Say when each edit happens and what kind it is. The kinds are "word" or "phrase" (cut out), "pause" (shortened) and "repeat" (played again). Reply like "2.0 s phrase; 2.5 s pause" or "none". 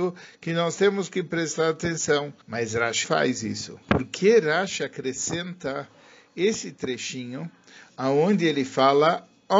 2.4 s pause; 3.0 s word; 3.8 s pause